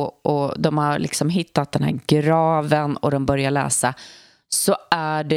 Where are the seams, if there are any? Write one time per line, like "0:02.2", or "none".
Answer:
none